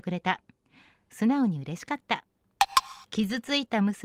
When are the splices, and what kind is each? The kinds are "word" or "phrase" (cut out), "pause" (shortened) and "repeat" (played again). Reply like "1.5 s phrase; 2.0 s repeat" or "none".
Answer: 3.0 s pause